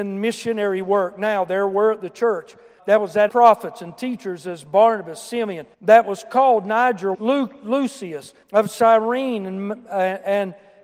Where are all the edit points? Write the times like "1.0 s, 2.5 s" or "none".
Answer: 2.8 s, 3.3 s, 5.7 s, 7.1 s, 8.4 s